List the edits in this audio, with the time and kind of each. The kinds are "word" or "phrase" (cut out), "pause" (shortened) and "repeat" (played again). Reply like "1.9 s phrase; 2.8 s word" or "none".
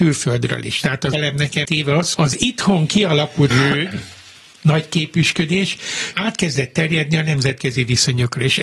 1.1 s word; 1.6 s word; 2.1 s word; 3.5 s word; 6.1 s word